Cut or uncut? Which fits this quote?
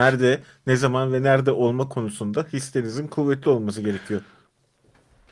uncut